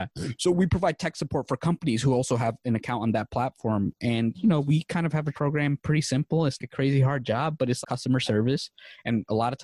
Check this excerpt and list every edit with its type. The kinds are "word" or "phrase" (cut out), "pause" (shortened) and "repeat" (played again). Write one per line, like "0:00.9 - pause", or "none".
0:05.3 - word
0:06.6 - phrase
0:07.8 - word